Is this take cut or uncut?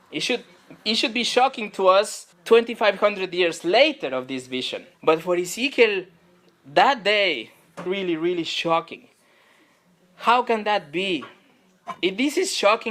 cut